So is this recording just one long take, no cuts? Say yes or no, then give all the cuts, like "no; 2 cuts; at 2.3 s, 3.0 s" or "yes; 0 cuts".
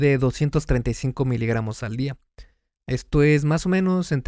yes; 0 cuts